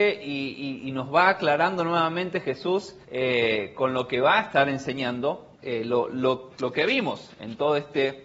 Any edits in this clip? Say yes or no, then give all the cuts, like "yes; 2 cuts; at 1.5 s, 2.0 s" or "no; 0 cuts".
yes; 3 cuts; at 3.0 s, 5.5 s, 6.5 s